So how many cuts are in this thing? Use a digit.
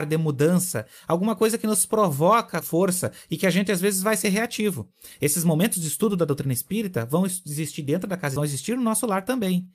2